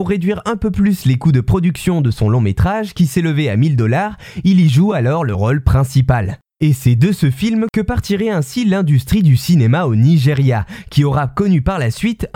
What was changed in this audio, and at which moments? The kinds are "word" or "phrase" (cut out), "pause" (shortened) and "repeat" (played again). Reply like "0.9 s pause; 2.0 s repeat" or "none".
none